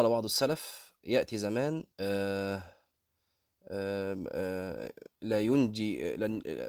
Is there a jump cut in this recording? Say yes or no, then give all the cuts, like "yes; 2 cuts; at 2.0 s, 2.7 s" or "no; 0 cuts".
yes; 1 cut; at 1.9 s